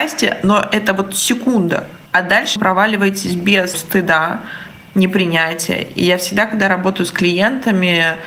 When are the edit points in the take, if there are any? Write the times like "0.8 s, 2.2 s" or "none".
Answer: 2.1 s, 2.6 s, 3.7 s